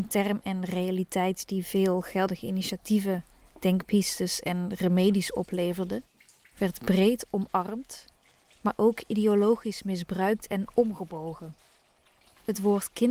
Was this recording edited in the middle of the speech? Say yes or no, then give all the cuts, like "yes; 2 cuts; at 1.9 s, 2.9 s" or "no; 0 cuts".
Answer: no; 0 cuts